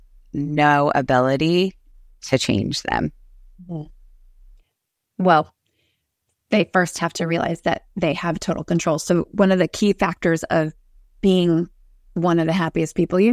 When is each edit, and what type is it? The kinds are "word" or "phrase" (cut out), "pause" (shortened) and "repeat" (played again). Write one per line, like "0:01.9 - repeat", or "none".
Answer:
none